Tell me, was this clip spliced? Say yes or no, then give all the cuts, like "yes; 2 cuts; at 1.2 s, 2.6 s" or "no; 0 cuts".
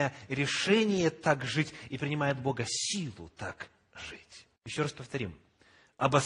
yes; 1 cut; at 4.6 s